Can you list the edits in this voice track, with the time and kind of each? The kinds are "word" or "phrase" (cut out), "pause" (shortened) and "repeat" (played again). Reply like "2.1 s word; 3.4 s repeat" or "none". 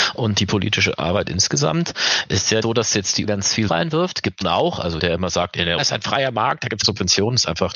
2.6 s word; 3.2 s word; 3.7 s word; 4.4 s word; 5.0 s word; 5.8 s word; 6.8 s word